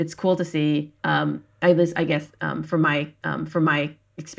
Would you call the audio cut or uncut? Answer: cut